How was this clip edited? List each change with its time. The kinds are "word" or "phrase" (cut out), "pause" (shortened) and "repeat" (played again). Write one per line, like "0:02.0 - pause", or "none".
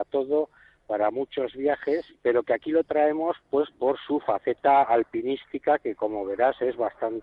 0:02.1 - pause